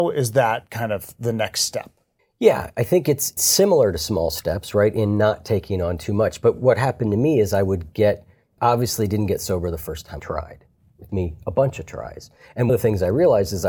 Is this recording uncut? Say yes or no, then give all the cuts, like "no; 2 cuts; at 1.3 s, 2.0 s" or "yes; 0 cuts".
no; 3 cuts; at 10.2 s, 11.1 s, 12.7 s